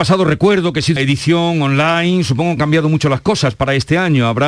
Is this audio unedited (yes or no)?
no